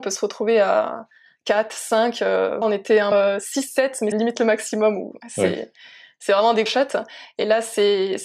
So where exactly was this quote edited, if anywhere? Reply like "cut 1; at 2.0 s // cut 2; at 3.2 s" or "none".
cut 1; at 2.6 s // cut 2; at 3.1 s // cut 3; at 4.1 s // cut 4; at 6.7 s